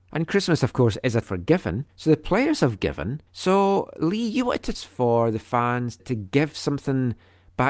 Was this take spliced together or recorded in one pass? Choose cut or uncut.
cut